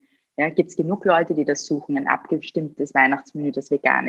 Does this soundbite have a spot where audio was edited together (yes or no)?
no